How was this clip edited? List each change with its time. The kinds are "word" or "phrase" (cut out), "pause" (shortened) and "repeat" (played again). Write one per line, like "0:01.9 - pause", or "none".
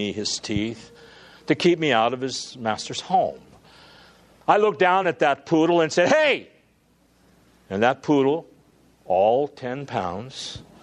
none